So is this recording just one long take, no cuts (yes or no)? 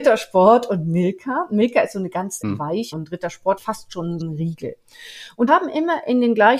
no